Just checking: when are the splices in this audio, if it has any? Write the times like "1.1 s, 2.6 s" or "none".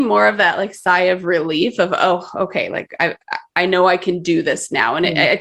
none